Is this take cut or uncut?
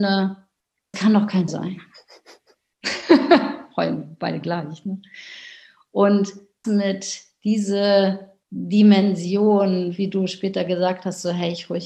cut